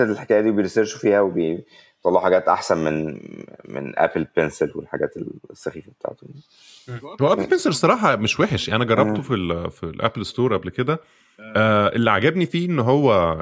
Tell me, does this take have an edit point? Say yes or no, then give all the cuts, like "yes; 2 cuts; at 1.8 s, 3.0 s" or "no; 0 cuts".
no; 0 cuts